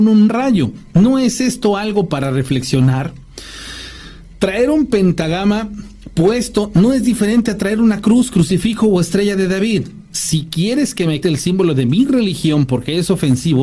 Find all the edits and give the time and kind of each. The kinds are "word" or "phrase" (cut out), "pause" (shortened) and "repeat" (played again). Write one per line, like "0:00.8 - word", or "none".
0:11.2 - word

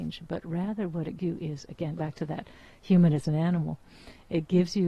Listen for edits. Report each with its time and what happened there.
0:01.2 - word
0:02.0 - word

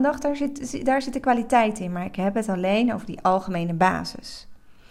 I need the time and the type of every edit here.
none

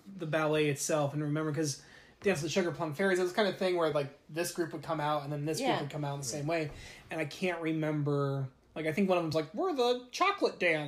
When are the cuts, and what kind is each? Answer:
none

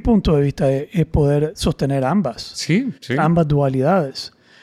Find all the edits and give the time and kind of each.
0:03.0 - pause

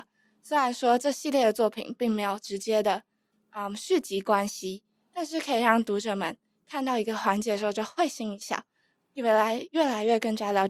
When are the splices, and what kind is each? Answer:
none

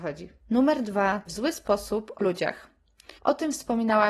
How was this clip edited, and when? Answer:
0:01.3 - phrase
0:02.2 - word
0:03.2 - pause

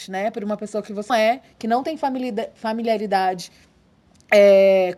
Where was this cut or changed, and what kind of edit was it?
0:01.1 - word

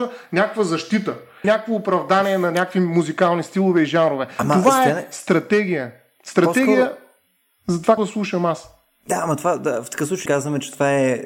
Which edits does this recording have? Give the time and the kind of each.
0:01.4 - word
0:08.0 - word
0:10.3 - word

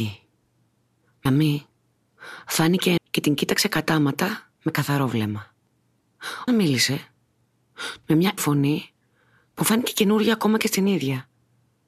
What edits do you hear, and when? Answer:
0:01.3 - phrase
0:03.0 - phrase
0:04.6 - pause
0:06.5 - word
0:08.0 - word
0:08.4 - word

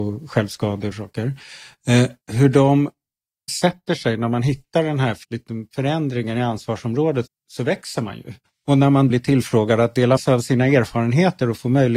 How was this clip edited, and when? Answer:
0:00.9 - phrase
0:02.2 - pause
0:03.5 - phrase
0:05.2 - pause
0:07.3 - word
0:08.5 - pause
0:09.1 - word
0:10.2 - word

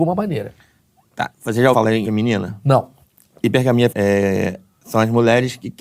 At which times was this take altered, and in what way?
0:01.7 - word
0:02.0 - word
0:03.9 - word

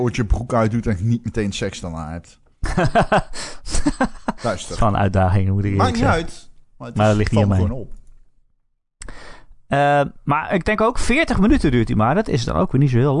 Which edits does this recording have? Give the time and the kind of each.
none

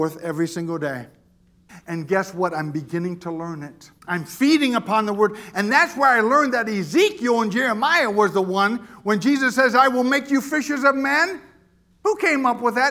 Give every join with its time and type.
0:04.0 - pause

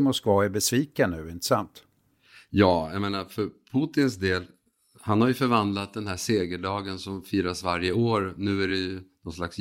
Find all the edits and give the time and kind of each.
none

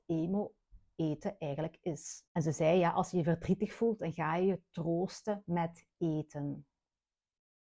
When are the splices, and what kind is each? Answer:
0:02.3 - pause

